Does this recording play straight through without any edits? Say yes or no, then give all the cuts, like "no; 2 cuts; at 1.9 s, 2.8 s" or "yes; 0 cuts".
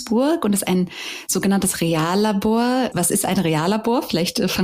yes; 0 cuts